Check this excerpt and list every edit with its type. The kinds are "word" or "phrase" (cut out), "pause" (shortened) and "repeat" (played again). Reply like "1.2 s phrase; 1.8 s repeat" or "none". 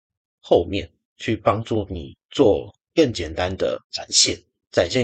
2.8 s pause; 3.8 s pause